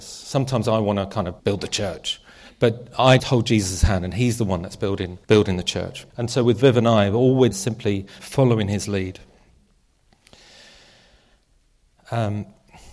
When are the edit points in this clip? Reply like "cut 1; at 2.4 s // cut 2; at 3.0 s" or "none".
cut 1; at 1.4 s // cut 2; at 3.2 s // cut 3; at 5.2 s // cut 4; at 6.1 s // cut 5; at 7.5 s // cut 6; at 8.2 s